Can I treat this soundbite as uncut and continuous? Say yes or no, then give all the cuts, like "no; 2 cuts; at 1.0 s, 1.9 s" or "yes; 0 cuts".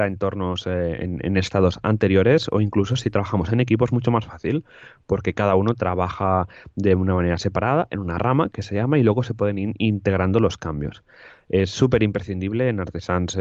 yes; 0 cuts